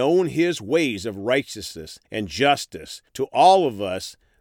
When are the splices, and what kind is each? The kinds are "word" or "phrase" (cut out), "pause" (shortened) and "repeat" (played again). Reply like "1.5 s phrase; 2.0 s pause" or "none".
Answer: 2.0 s pause; 3.1 s pause